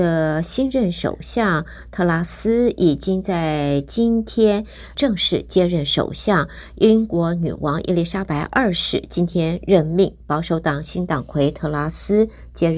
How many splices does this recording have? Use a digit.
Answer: 1